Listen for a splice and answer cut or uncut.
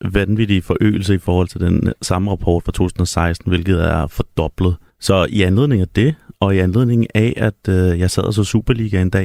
cut